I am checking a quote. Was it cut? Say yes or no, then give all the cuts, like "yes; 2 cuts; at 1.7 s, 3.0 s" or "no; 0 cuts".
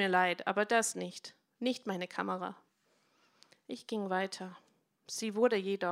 no; 0 cuts